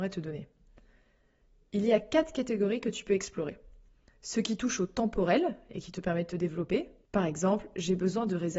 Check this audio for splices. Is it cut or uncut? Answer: uncut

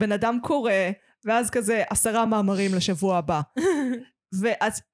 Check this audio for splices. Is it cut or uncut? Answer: uncut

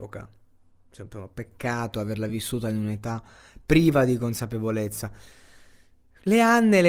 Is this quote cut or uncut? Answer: uncut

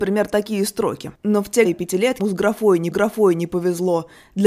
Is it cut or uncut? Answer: cut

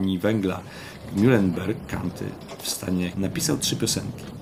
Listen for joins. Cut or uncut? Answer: cut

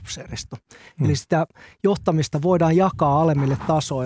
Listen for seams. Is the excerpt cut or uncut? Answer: uncut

